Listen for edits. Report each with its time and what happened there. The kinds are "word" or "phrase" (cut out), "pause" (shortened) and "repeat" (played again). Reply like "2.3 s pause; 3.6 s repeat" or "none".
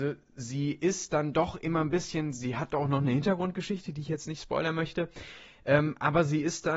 none